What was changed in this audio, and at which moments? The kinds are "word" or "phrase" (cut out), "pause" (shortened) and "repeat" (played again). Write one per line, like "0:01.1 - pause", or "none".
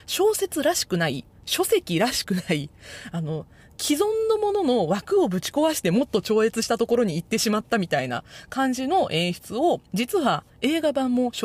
0:09.9 - pause